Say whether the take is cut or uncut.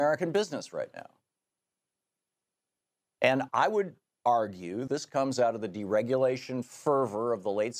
cut